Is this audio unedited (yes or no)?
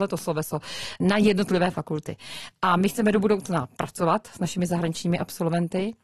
yes